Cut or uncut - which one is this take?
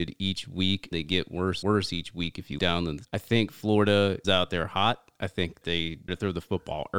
cut